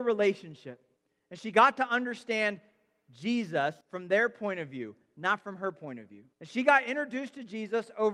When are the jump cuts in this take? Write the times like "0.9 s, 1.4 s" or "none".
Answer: 1.0 s, 3.8 s, 6.3 s